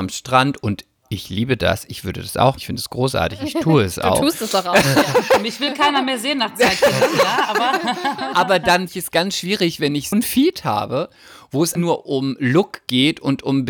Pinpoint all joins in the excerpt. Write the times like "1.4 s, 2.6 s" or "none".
2.6 s, 8.9 s, 10.1 s, 11.8 s